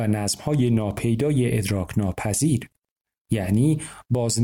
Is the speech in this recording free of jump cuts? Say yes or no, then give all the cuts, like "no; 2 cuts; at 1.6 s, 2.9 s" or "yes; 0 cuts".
yes; 0 cuts